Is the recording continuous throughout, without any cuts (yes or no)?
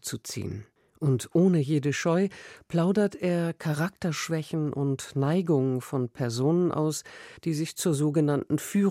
no